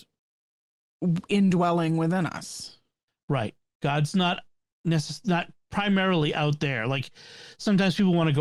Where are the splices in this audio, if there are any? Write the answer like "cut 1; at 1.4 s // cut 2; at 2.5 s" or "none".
none